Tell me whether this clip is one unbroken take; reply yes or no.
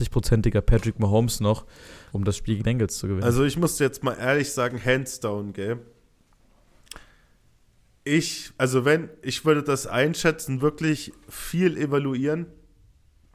no